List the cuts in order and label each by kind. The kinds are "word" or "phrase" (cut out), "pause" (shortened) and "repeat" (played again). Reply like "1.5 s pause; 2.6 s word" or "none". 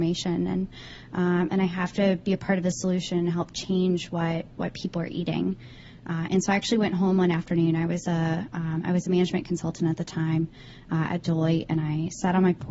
none